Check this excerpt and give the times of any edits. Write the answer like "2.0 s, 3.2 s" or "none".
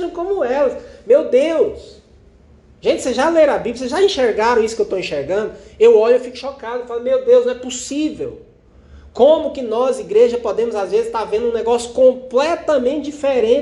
none